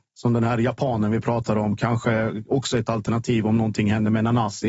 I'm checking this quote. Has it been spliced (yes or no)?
no